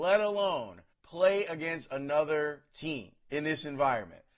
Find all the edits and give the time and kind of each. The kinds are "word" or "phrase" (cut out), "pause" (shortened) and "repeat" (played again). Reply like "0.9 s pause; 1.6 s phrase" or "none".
0.9 s pause; 3.2 s pause